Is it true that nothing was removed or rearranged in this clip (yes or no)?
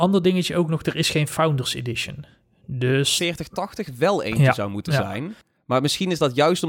no